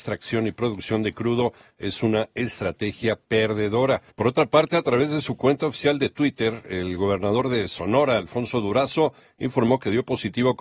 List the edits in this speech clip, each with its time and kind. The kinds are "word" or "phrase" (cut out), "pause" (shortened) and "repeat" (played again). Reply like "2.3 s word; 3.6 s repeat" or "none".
4.1 s pause